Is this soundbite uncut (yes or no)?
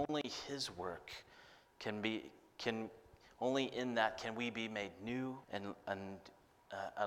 no